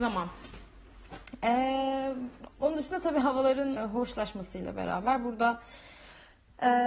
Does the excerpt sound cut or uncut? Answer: cut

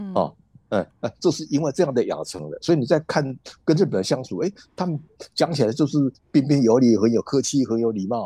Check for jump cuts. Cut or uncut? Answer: cut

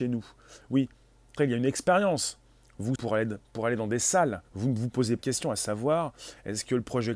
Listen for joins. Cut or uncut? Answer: cut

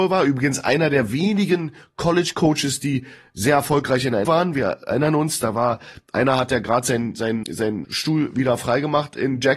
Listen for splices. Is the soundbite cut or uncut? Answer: cut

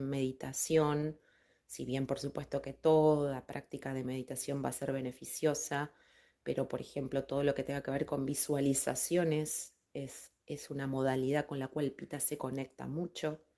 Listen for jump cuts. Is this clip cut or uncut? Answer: uncut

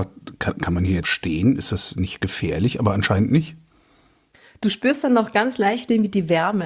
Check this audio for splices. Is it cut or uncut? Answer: cut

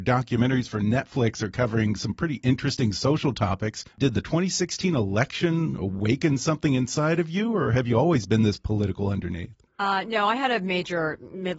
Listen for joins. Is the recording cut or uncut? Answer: cut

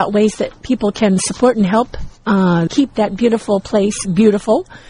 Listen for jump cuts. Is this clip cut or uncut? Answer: cut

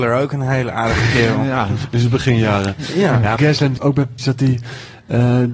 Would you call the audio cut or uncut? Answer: cut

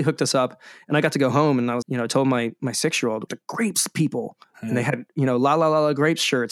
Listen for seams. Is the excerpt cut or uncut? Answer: cut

